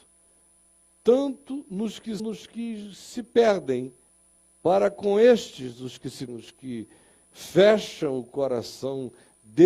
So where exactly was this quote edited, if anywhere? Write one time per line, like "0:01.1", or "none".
0:02.2
0:04.1
0:06.3